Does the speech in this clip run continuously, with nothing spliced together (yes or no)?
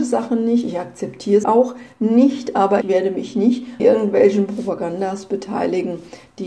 no